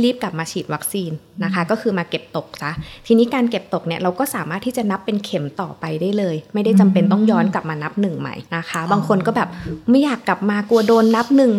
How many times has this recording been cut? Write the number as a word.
one